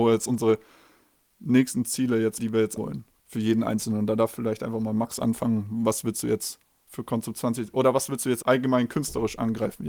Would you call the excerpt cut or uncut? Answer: cut